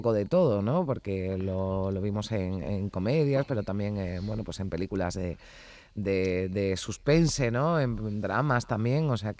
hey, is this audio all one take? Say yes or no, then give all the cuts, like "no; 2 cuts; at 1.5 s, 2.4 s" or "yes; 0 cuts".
yes; 0 cuts